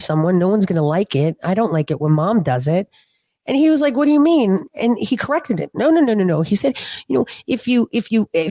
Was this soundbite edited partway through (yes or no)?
no